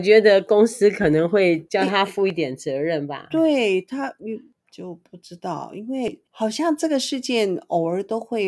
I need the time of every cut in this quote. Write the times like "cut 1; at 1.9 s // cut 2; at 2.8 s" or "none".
cut 1; at 6.3 s